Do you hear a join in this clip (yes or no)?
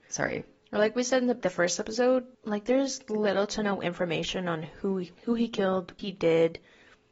yes